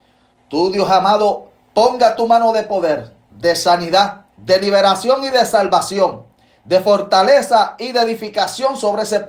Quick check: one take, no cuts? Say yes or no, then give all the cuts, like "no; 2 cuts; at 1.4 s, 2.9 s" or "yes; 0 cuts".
yes; 0 cuts